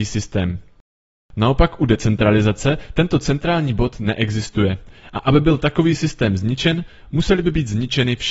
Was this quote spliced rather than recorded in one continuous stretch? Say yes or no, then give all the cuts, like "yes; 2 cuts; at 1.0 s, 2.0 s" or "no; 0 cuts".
no; 0 cuts